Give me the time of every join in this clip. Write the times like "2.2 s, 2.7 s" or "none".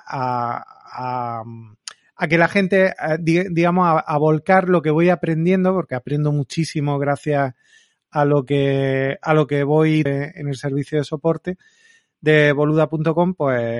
10.1 s